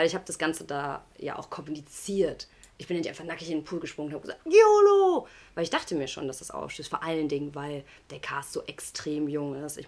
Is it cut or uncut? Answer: uncut